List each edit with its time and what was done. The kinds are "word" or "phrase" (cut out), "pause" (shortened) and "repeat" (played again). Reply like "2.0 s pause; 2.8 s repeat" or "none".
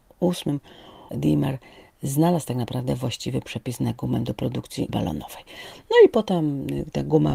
1.1 s word; 4.9 s word